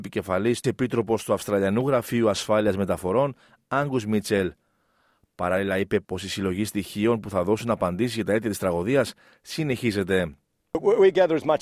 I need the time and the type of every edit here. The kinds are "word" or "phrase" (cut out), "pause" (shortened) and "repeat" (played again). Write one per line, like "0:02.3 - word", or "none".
none